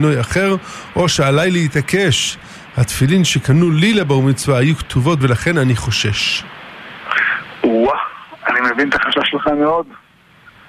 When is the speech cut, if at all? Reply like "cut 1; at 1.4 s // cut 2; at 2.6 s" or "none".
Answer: cut 1; at 5.2 s // cut 2; at 8.4 s